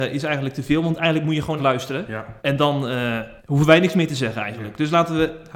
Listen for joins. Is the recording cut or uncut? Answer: cut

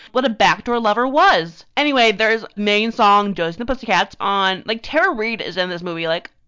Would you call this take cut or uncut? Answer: cut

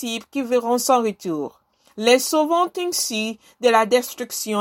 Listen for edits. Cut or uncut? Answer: uncut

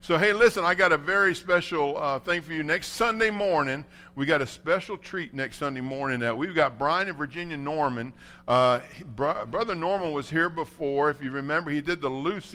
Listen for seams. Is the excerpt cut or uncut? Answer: uncut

